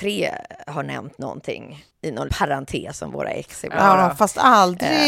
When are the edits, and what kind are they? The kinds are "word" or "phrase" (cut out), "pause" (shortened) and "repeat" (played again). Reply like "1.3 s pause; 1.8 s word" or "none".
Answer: 1.9 s word; 2.3 s word